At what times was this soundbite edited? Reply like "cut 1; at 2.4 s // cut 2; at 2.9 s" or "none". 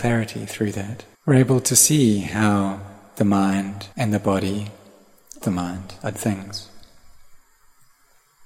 cut 1; at 1.1 s // cut 2; at 3.9 s // cut 3; at 5.4 s // cut 4; at 6.1 s